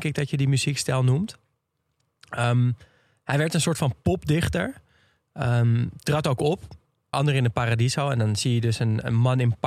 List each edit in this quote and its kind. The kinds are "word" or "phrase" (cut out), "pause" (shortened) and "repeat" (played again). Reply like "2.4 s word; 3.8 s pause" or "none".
7.1 s word

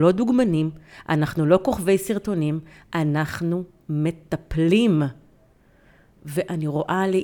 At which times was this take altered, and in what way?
none

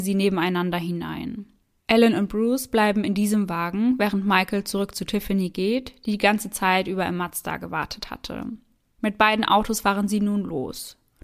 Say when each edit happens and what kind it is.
none

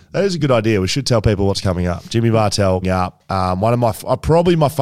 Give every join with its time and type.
2.8 s word

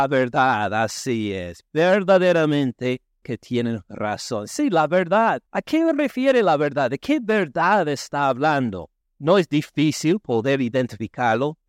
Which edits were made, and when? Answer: 3.2 s word; 5.5 s pause; 9.0 s pause

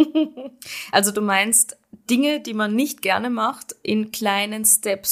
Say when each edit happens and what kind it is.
none

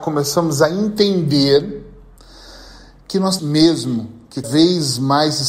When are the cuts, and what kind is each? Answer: 3.4 s word; 4.4 s word

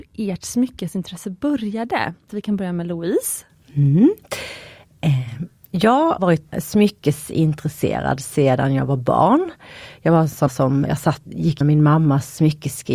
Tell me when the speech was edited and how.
2.3 s word; 6.2 s word; 6.5 s word; 10.5 s word; 10.9 s word; 11.3 s word; 11.6 s word

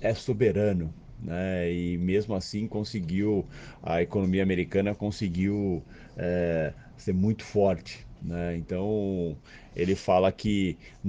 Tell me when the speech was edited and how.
none

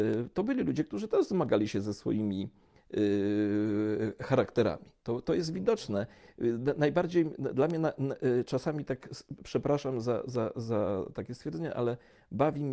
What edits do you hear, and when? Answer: 5.0 s pause

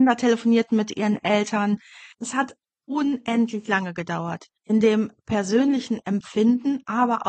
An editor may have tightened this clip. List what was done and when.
2.1 s pause; 4.6 s pause

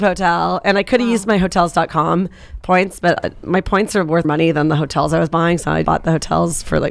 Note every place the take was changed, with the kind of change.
4.2 s word; 5.8 s word

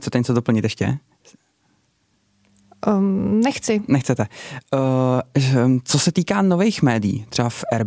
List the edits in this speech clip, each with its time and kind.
none

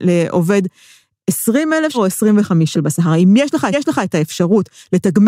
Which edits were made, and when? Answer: 1.9 s phrase; 2.7 s phrase; 3.7 s repeat

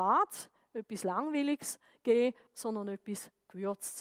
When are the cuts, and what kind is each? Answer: 2.5 s pause

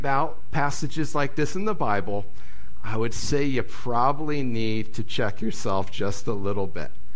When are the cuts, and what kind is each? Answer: none

